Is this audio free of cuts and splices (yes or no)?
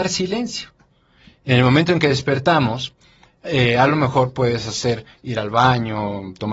yes